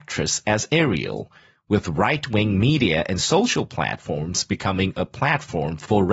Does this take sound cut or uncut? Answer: uncut